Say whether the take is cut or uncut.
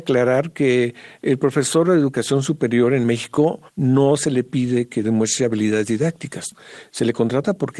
cut